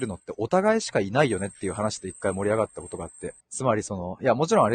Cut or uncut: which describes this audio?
cut